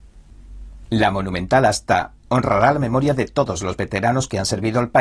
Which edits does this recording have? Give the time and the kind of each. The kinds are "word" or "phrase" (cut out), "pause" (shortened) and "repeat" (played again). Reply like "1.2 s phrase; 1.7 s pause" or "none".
none